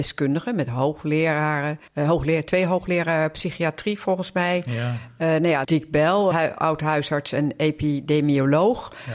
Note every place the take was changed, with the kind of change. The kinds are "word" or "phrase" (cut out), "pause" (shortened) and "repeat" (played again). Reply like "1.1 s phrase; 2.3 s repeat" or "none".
1.9 s pause; 5.6 s word; 6.3 s word